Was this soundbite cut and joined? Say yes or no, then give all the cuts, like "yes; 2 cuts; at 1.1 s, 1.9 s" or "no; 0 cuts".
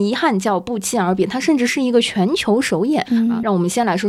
yes; 1 cut; at 3.0 s